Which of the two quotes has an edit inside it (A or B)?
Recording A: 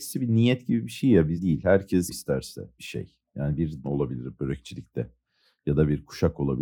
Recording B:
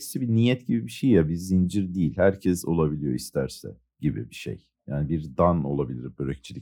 A